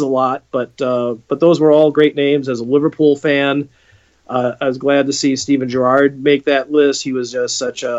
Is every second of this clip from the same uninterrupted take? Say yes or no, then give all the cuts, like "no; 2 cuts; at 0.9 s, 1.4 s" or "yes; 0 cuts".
yes; 0 cuts